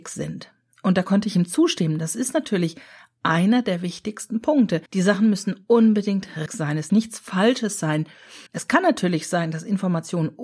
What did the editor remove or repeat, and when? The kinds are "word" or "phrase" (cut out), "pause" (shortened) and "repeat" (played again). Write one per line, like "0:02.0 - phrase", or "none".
0:04.9 - pause
0:06.5 - word
0:06.9 - word
0:08.5 - pause